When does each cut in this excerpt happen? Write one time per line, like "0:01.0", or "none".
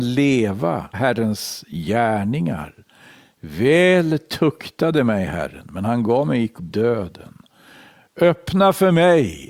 0:00.9
0:06.6